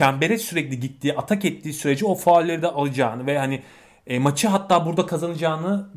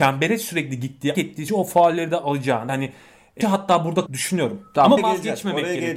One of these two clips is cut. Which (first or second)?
second